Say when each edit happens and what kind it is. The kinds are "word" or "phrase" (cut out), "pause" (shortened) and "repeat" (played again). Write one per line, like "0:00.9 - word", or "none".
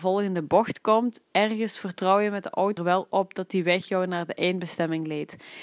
0:02.8 - word

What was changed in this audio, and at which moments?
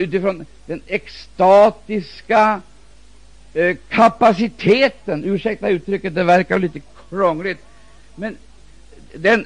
none

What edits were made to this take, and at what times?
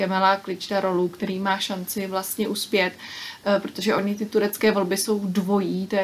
none

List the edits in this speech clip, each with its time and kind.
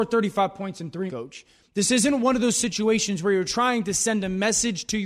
0:01.1 - word

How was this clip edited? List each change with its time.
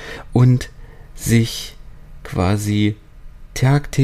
none

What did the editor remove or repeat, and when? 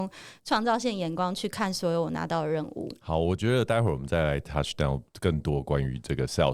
0:05.1 - pause

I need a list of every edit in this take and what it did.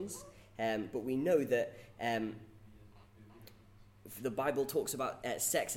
none

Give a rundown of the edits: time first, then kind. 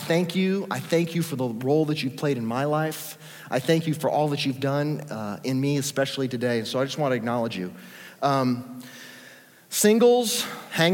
none

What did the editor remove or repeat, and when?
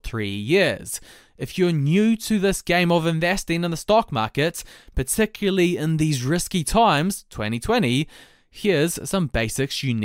none

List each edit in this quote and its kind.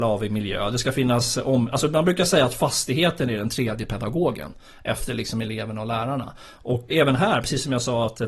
0:06.9 - word

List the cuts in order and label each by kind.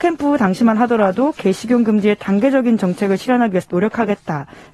none

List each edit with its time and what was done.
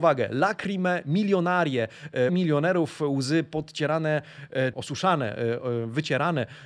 0:02.3 - word
0:04.7 - word

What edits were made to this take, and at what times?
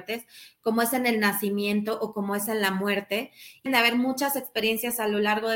0:03.7 - word

